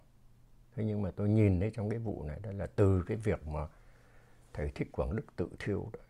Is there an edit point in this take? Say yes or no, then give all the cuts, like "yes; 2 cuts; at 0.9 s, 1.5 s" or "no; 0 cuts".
no; 0 cuts